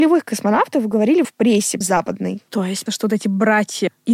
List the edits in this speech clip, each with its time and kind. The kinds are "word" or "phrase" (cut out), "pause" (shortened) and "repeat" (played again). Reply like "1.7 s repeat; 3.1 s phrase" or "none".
1.2 s word; 1.8 s word; 2.5 s pause; 2.9 s word